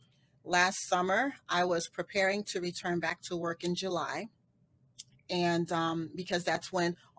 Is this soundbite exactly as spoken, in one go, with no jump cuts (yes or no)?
yes